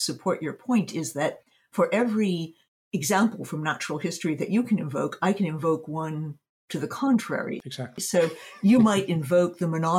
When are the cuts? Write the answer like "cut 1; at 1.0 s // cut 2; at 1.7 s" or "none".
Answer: none